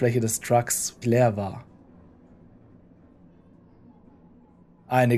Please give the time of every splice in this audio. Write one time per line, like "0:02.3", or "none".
0:01.0